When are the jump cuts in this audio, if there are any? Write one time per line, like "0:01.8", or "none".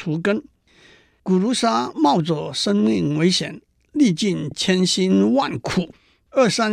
none